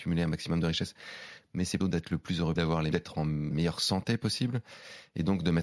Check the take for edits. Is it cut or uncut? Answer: cut